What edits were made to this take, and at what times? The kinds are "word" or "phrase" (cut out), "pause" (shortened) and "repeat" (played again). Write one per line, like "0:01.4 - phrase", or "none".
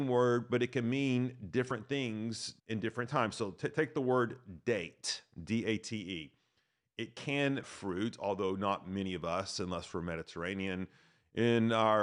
0:02.6 - pause
0:07.6 - phrase